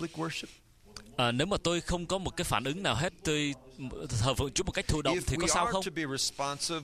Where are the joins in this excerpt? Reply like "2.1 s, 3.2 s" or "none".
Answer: none